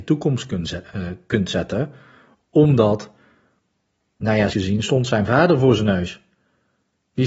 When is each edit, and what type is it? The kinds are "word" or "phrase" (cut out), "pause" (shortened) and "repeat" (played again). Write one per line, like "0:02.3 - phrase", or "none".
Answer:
0:04.5 - word